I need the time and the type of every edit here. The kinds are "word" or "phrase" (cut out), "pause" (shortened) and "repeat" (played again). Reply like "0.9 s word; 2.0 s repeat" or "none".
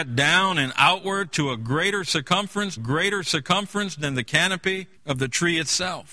2.8 s repeat; 5.0 s pause